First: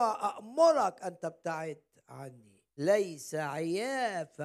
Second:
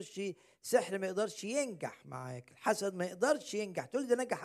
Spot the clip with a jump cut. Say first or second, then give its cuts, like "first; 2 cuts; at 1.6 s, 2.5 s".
first; 1 cut; at 2.7 s